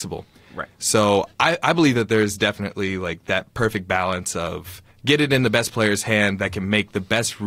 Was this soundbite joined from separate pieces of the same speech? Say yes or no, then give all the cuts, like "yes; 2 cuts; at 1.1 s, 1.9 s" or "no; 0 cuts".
yes; 2 cuts; at 1.3 s, 4.9 s